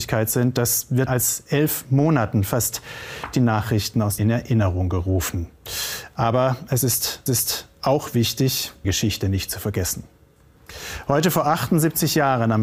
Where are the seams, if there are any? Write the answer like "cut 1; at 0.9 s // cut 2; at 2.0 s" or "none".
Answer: cut 1; at 1.1 s // cut 2; at 3.3 s // cut 3; at 4.2 s // cut 4; at 7.3 s // cut 5; at 8.8 s

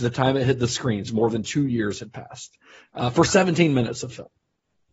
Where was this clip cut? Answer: none

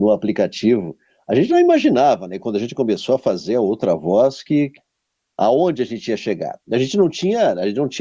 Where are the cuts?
none

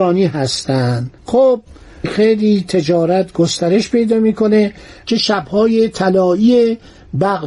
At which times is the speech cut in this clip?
cut 1; at 1.2 s

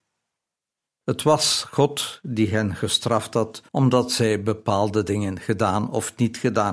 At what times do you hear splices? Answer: cut 1; at 3.7 s

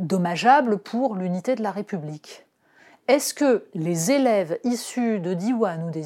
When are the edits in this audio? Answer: none

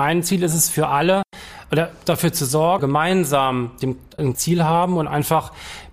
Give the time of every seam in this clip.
cut 1; at 2.8 s // cut 2; at 4.3 s

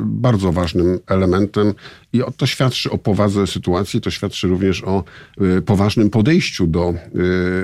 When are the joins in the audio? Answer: none

